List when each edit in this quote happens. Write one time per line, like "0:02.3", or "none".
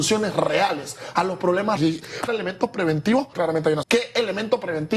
0:01.8
0:02.3
0:03.3
0:03.8